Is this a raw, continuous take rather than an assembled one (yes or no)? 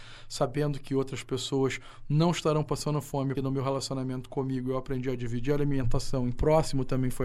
no